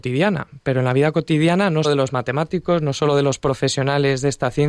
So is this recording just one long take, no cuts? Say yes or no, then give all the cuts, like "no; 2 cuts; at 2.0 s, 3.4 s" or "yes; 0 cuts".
no; 1 cut; at 1.8 s